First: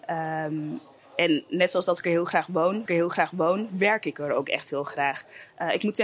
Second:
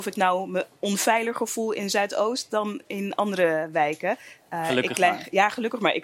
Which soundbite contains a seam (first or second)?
first